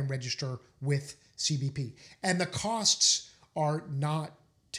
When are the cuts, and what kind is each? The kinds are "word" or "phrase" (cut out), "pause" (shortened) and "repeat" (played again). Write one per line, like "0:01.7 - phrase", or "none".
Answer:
none

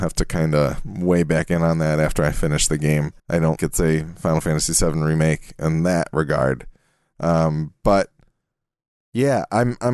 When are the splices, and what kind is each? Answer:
0:03.2 - pause
0:03.6 - word

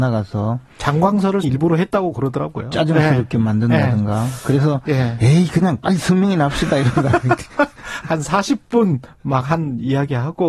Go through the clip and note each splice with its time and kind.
0:01.4 - word

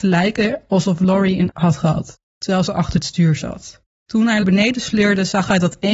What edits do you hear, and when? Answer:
0:01.5 - word
0:02.3 - pause
0:02.7 - word
0:03.9 - pause
0:04.4 - phrase

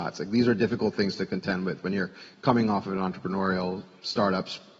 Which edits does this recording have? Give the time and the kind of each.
none

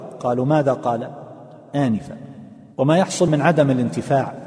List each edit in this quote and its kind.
0:02.7 - pause
0:03.3 - word

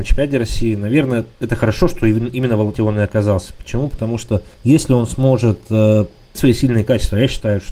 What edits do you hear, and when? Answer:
0:01.3 - pause
0:02.7 - word
0:04.5 - pause
0:06.3 - word

